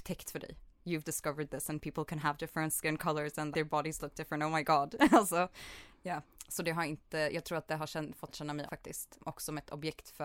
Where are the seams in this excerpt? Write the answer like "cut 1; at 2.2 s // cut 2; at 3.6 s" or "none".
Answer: cut 1; at 1.0 s // cut 2; at 3.5 s // cut 3; at 8.3 s // cut 4; at 8.7 s